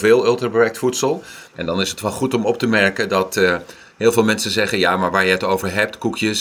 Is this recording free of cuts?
no; 1 cut; at 1.5 s

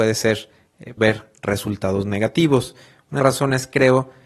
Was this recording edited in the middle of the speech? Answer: yes; 2 cuts; at 1.0 s, 3.2 s

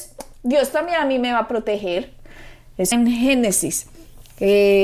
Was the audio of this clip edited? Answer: yes; 1 cut; at 2.9 s

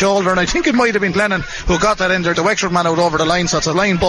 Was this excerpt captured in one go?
no; 2 cuts; at 1.1 s, 2.3 s

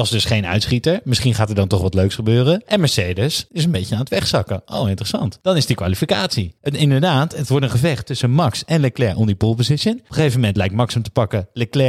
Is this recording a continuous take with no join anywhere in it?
yes; 0 cuts

